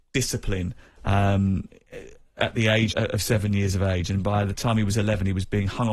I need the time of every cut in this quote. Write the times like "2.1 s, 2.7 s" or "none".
2.9 s